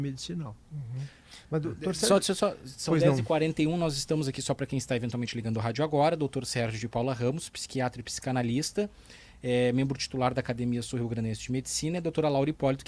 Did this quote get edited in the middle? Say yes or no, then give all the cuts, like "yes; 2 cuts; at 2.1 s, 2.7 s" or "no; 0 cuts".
no; 0 cuts